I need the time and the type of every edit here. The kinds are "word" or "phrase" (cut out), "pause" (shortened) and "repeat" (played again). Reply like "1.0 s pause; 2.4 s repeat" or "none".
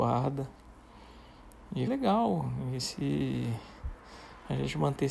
1.9 s word